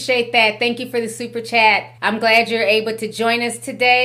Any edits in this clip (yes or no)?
yes